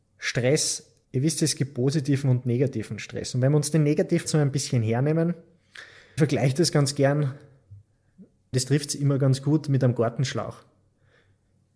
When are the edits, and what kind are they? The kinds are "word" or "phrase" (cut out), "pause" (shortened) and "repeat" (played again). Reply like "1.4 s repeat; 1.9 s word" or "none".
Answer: 1.0 s pause; 4.3 s word; 6.2 s word; 8.5 s word